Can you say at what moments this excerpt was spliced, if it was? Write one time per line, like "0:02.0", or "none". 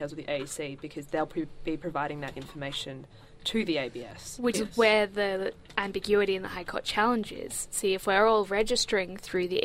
0:04.5

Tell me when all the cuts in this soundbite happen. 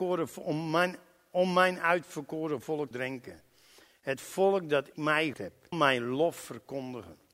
0:02.9
0:04.9
0:05.3
0:05.7

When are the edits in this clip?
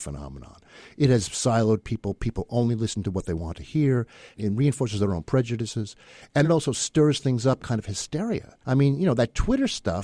0:06.4
0:07.6
0:08.6

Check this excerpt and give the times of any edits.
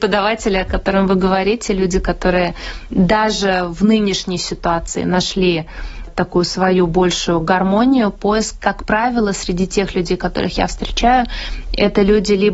none

